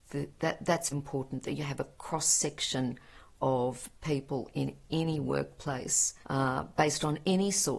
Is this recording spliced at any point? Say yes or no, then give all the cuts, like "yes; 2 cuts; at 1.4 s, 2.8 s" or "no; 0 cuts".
yes; 2 cuts; at 0.9 s, 6.2 s